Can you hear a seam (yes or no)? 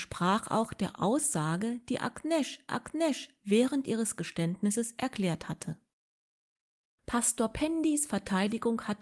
yes